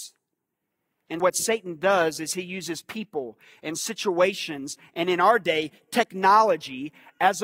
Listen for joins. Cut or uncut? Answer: cut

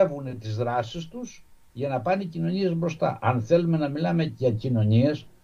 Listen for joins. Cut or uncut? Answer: uncut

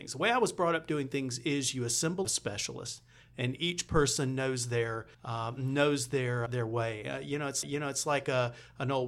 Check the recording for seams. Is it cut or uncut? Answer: cut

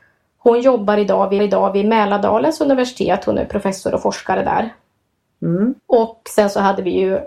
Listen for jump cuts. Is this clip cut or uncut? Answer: cut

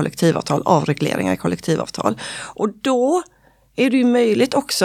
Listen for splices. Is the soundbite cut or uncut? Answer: uncut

